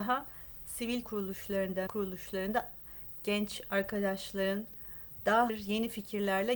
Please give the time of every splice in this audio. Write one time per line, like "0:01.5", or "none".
0:01.0
0:01.9
0:05.5